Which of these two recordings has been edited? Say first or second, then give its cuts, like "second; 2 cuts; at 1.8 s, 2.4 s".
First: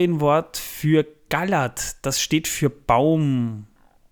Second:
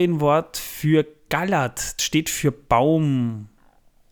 second; 1 cut; at 2.0 s